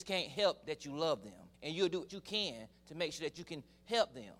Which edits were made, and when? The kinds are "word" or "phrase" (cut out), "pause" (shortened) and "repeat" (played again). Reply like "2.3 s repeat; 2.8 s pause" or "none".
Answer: 1.5 s pause; 2.1 s phrase

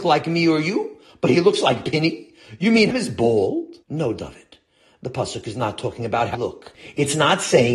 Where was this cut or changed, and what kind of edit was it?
2.9 s word; 3.8 s pause; 6.3 s word

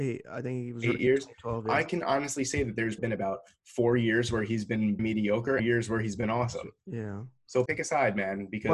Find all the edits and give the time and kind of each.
3.0 s word; 5.0 s word; 5.6 s phrase; 7.7 s word

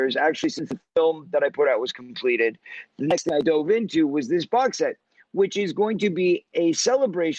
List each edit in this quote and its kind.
none

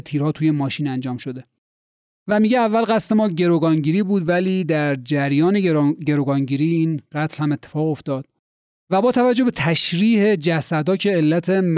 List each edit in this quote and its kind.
none

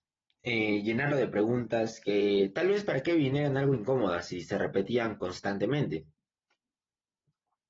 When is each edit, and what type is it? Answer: none

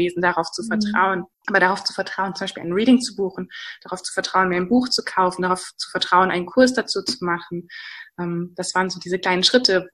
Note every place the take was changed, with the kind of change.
1.3 s pause

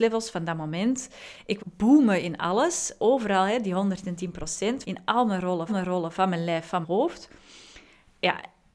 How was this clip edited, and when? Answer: 1.6 s word; 4.8 s phrase; 5.7 s repeat; 6.8 s word

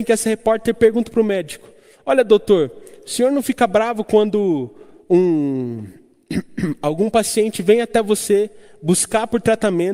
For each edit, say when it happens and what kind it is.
none

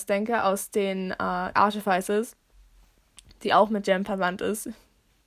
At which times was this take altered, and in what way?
1.5 s word

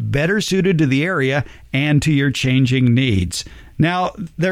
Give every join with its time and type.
none

